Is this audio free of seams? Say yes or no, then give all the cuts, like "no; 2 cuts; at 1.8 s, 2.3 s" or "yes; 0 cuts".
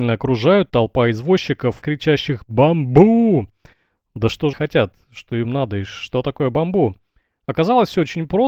no; 2 cuts; at 1.8 s, 4.5 s